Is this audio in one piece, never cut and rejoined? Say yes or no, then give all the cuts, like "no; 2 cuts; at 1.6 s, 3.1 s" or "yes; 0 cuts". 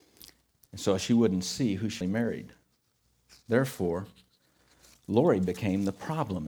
no; 1 cut; at 2.0 s